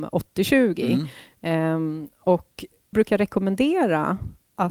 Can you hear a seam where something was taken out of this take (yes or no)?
yes